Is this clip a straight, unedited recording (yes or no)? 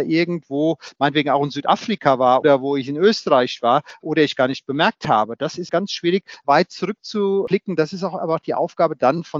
no